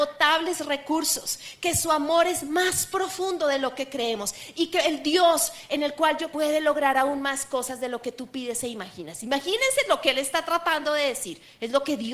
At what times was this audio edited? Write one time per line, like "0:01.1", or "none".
0:06.3